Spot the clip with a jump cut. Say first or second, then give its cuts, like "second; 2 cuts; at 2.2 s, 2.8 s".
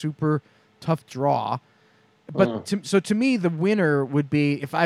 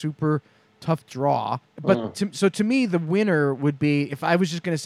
second; 1 cut; at 1.7 s